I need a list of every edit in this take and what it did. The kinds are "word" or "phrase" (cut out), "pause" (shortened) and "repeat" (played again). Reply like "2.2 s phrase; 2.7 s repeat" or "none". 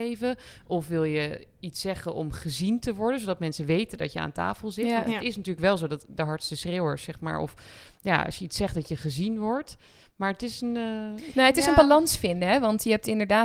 none